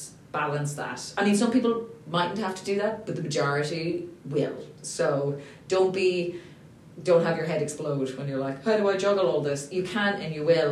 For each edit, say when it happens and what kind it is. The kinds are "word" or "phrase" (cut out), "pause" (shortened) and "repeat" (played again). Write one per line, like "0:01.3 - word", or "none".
0:07.0 - word